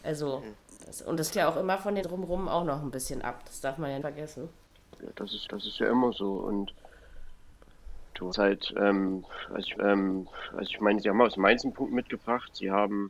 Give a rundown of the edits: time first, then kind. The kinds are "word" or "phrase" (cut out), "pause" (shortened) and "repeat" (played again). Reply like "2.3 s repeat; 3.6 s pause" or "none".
1.3 s word; 2.0 s word; 4.0 s word; 5.5 s repeat; 8.3 s word; 9.8 s repeat